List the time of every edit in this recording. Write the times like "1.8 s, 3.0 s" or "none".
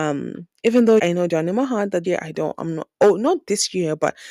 1.0 s, 1.3 s, 2.0 s